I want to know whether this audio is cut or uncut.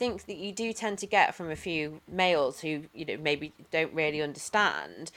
cut